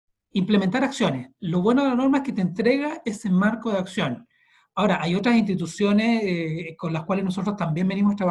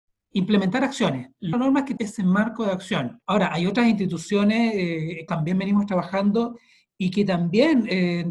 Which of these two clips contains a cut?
second; 4 cuts; at 1.5 s, 2.0 s, 3.2 s, 5.3 s

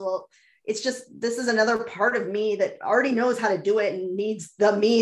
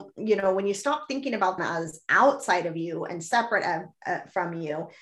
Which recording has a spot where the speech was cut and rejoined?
second; 1 cut; at 1.6 s

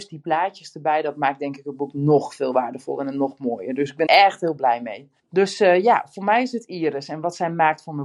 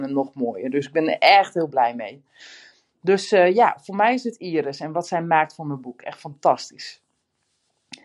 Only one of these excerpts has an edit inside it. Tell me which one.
first; 2 cuts; at 4.1 s, 5.2 s

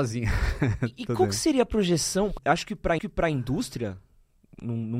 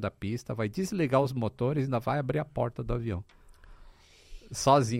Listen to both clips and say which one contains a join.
first; 2 cuts; at 2.4 s, 3.0 s

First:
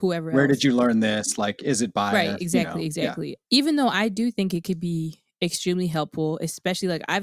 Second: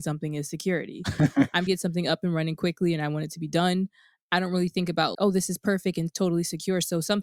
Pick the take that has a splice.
second; 2 cuts; at 1.7 s, 5.1 s

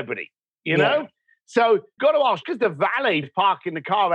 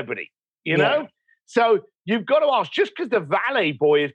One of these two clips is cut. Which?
first; 3 cuts; at 2.0 s, 2.4 s, 3.2 s

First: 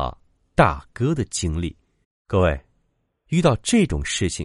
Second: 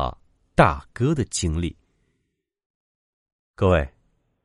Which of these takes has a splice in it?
first; 1 cut; at 2.0 s

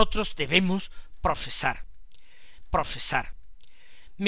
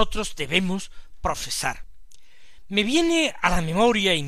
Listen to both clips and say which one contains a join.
first; 1 cut; at 2.6 s

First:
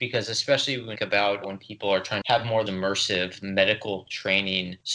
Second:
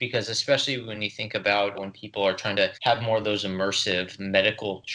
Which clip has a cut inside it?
first; 3 cuts; at 1.0 s, 2.2 s, 2.7 s

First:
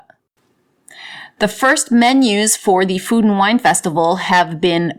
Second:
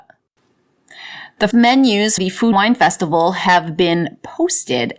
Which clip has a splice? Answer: second; 3 cuts; at 1.5 s, 2.2 s, 2.5 s

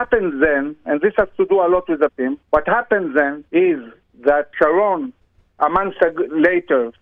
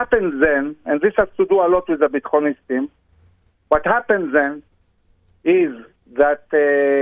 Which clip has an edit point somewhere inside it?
first; 4 cuts; at 2.1 s, 2.4 s, 3.5 s, 4.5 s

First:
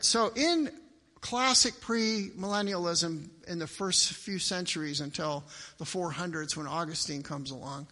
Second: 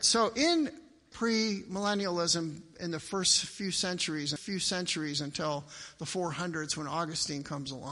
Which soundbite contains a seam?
second; 2 cuts; at 1.1 s, 4.4 s

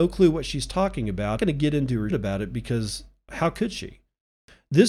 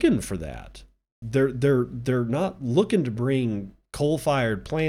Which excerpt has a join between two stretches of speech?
first; 2 cuts; at 1.4 s, 2.1 s

